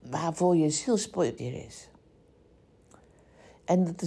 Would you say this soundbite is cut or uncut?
cut